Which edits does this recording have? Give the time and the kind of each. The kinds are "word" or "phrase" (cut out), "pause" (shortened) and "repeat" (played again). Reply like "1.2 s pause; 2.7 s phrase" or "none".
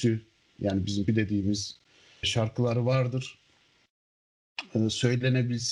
1.1 s word; 2.2 s word